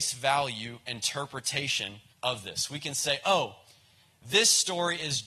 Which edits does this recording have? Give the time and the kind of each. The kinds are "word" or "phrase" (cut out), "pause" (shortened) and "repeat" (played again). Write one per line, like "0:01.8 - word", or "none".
0:02.1 - pause